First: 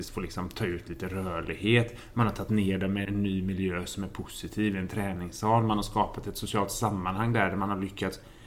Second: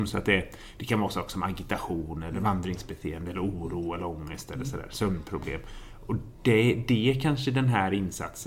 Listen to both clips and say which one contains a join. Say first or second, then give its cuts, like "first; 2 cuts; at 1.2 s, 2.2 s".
first; 1 cut; at 3.0 s